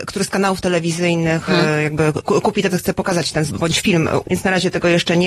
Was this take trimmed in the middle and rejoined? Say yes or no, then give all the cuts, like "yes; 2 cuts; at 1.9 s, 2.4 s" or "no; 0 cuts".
yes; 5 cuts; at 1.5 s, 2.2 s, 2.7 s, 3.5 s, 4.2 s